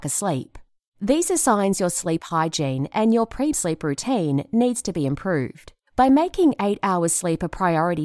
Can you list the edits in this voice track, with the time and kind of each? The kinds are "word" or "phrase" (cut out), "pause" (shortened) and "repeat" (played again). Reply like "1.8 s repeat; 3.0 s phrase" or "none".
3.5 s word

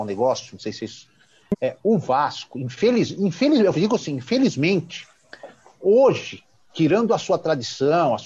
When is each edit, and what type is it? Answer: none

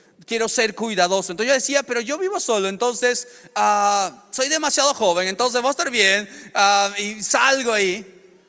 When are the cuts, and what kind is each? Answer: none

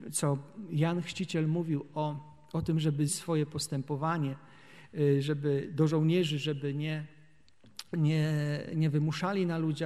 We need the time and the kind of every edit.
3.1 s word

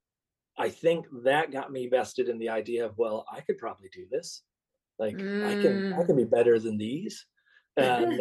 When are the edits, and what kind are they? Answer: none

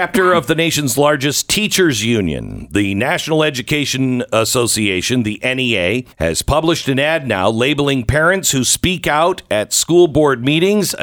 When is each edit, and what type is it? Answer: 6.1 s pause

